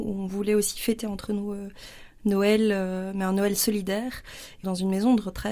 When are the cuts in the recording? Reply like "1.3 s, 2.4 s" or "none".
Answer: 4.6 s